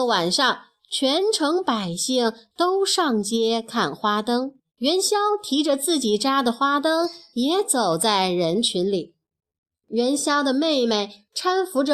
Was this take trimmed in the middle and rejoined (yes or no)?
yes